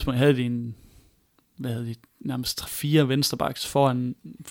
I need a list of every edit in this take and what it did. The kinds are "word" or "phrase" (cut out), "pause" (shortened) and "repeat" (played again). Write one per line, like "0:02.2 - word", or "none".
0:02.7 - word

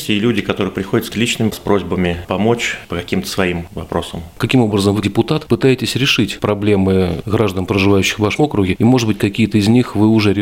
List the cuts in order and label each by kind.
0:01.1 - word
0:01.5 - word
0:05.0 - word
0:08.4 - word

